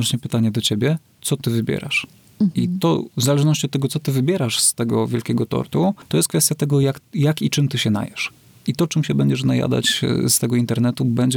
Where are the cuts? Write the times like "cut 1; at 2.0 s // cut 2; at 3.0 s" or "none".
none

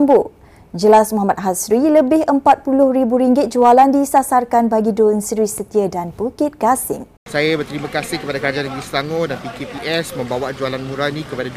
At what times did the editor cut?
cut 1; at 7.2 s

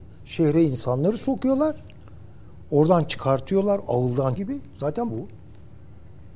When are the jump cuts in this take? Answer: cut 1; at 4.4 s // cut 2; at 5.1 s

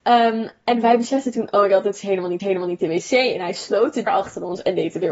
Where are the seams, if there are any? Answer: cut 1; at 2.4 s // cut 2; at 4.1 s

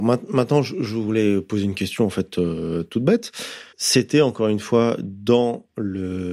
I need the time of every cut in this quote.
cut 1; at 3.7 s

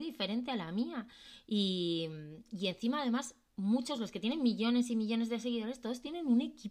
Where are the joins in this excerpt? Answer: none

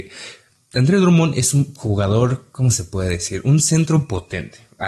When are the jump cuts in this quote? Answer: none

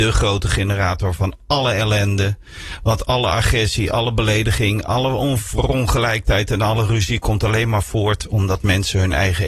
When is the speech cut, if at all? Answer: none

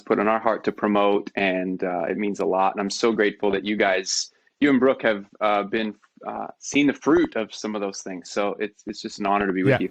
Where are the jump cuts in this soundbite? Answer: none

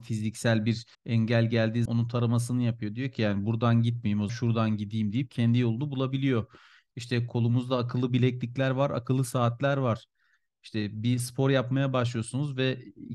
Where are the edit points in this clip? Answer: cut 1; at 0.9 s // cut 2; at 1.9 s // cut 3; at 4.3 s

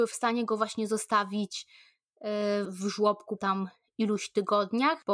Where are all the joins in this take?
cut 1; at 2.6 s // cut 2; at 3.4 s

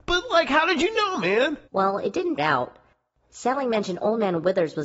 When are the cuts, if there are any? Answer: cut 1; at 1.7 s // cut 2; at 2.4 s

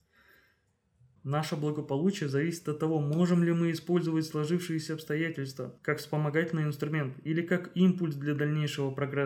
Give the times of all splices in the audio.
cut 1; at 5.8 s

